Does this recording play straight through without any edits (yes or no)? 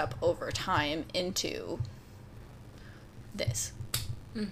yes